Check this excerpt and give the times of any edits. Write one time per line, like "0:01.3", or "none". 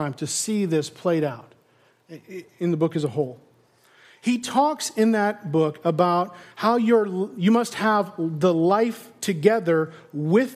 none